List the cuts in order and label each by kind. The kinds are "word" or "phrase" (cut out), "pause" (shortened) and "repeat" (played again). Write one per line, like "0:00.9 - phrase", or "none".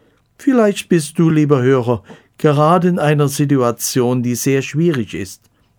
none